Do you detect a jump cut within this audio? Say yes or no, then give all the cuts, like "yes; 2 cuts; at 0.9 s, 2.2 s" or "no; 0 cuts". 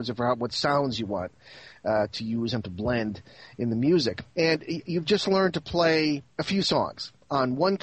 yes; 2 cuts; at 4.3 s, 6.3 s